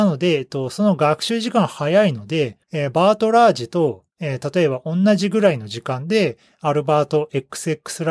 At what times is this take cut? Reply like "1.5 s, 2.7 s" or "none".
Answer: 2.6 s, 4.1 s